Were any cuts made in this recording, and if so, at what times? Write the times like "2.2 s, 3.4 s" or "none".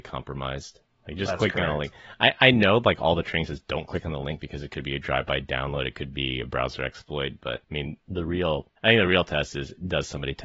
7.6 s, 8.8 s

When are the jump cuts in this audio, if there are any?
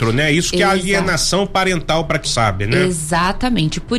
2.2 s

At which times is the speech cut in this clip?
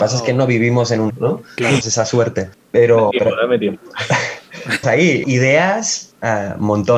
1.1 s, 1.8 s, 3.1 s, 4.8 s, 5.2 s

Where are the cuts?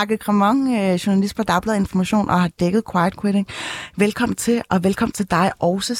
none

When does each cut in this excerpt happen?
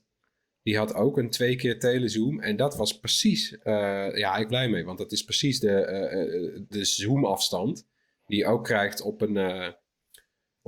4.5 s, 6.7 s

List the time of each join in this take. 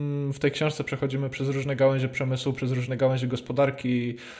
none

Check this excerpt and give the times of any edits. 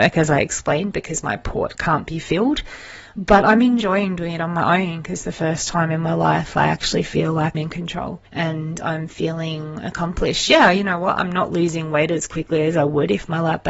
7.5 s, 8.3 s

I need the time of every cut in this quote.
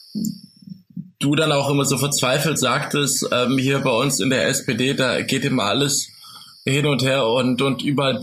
none

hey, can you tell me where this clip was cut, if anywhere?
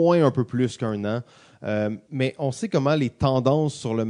2.1 s

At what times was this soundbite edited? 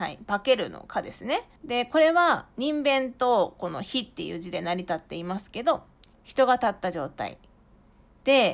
1.6 s, 6.1 s

